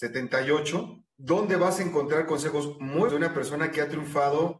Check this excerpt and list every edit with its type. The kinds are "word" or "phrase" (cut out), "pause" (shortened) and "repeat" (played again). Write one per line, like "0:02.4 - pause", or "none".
0:01.1 - pause
0:03.1 - word